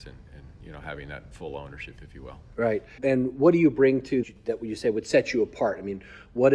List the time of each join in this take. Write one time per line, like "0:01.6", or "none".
0:03.0
0:04.2